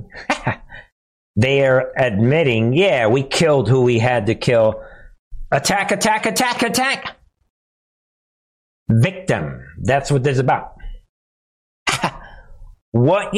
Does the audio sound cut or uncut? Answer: cut